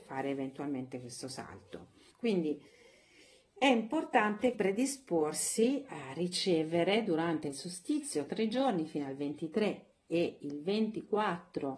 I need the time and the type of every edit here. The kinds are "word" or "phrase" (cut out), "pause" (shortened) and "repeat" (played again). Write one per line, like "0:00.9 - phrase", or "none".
0:02.1 - pause
0:04.5 - word
0:05.9 - word
0:07.5 - phrase
0:08.3 - phrase